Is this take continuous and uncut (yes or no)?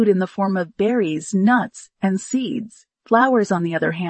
yes